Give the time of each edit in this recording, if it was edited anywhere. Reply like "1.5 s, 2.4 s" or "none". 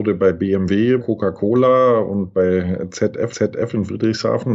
1.0 s, 3.3 s